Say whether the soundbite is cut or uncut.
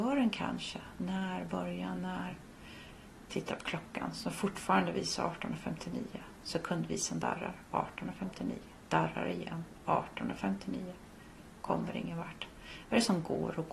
uncut